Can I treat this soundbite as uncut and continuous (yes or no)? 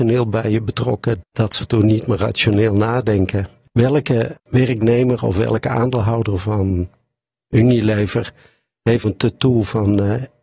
no